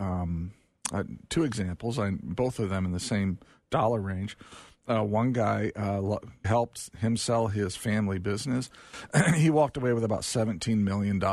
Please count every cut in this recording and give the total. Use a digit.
1